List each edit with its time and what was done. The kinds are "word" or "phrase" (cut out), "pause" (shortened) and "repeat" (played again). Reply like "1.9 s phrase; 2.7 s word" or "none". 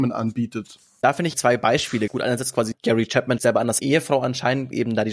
1.3 s word; 2.1 s word; 2.7 s word; 3.4 s word; 3.8 s word